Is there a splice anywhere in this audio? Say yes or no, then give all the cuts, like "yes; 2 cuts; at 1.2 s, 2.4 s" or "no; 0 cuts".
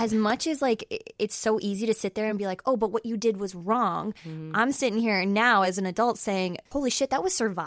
no; 0 cuts